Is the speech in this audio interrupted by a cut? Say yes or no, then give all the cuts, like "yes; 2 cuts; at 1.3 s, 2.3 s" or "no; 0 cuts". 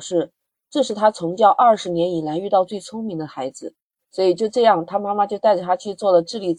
yes; 1 cut; at 4.0 s